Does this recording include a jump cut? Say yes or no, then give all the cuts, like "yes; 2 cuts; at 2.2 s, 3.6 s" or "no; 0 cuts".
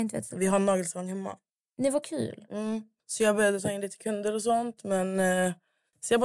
no; 0 cuts